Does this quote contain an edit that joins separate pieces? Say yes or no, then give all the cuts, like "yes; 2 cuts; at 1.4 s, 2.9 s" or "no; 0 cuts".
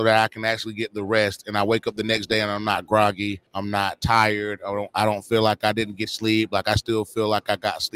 yes; 2 cuts; at 3.5 s, 6.1 s